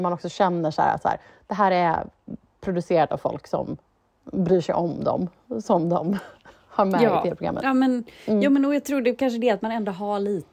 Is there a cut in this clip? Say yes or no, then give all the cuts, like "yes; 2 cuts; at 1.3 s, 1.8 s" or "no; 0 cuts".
no; 0 cuts